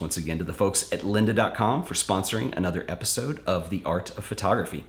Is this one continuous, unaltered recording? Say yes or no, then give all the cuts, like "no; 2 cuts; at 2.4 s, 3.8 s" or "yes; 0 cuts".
yes; 0 cuts